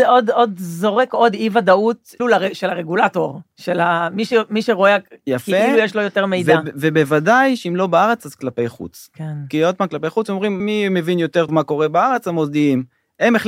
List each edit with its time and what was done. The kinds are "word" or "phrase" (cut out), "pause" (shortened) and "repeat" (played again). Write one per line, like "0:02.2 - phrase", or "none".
0:02.2 - word
0:10.6 - word
0:11.5 - word